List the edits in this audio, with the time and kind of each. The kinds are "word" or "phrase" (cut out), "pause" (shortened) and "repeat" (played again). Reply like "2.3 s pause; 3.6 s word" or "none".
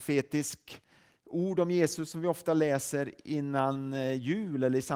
none